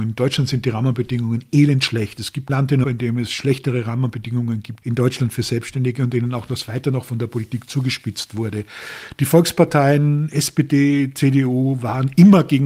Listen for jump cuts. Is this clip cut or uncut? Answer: cut